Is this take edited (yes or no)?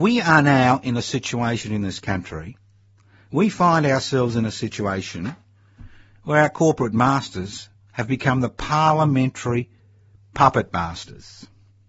no